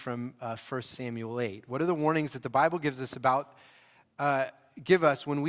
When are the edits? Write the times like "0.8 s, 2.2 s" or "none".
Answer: none

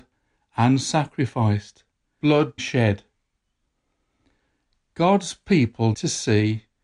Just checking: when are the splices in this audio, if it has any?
2.2 s, 2.6 s, 5.9 s

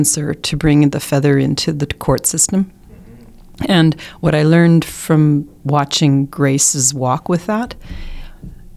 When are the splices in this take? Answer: none

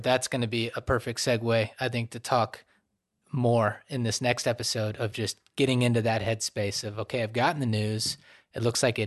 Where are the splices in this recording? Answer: none

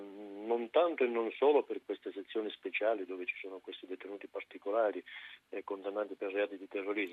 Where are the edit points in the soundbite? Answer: none

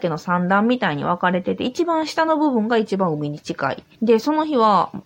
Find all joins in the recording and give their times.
3.9 s

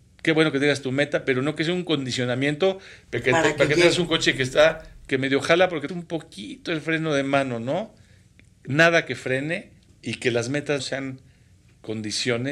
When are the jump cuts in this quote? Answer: 5.9 s, 9.9 s, 10.8 s

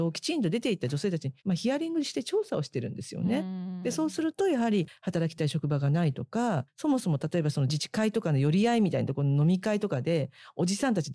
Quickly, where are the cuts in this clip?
1.4 s

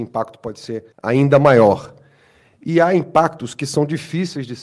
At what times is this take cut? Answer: 0.9 s

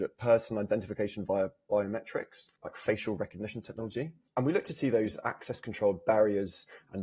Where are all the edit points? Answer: 2.6 s, 4.3 s

